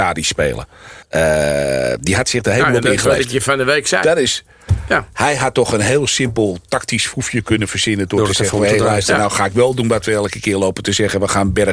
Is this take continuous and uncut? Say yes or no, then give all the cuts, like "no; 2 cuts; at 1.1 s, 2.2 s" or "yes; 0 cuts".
no; 1 cut; at 1.0 s